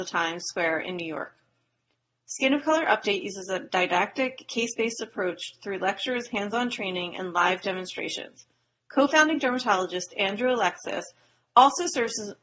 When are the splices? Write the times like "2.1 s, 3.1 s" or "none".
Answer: none